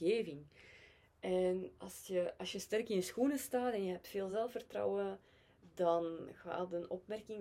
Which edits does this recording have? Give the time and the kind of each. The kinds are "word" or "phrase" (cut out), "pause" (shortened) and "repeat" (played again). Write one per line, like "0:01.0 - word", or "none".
none

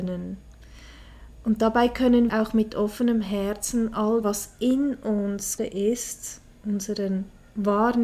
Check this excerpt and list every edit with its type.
0:02.3 - word
0:04.2 - word
0:05.6 - word

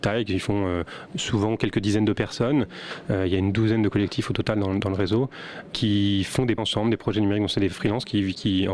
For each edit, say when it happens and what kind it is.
0:06.6 - word

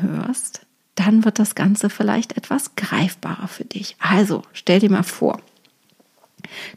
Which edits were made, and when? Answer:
none

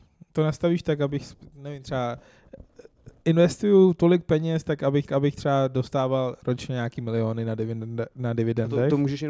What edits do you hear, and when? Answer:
0:05.1 - repeat

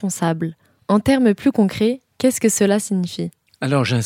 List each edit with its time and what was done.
none

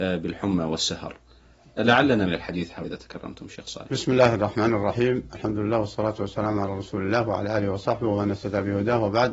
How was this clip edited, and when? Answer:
0:02.3 - word
0:02.8 - phrase

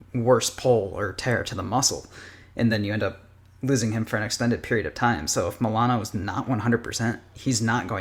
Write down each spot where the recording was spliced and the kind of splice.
none

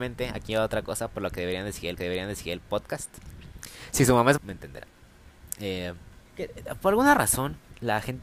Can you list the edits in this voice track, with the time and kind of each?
0:02.0 - repeat
0:04.4 - word
0:06.3 - pause

